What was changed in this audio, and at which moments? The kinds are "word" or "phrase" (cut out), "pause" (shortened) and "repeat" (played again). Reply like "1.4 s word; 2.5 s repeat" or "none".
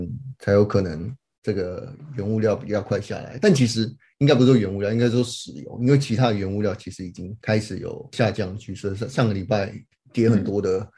none